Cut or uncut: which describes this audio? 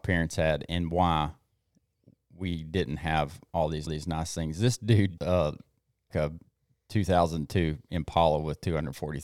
cut